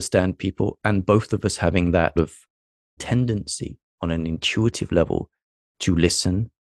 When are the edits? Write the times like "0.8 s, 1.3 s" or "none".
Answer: 2.2 s, 3.0 s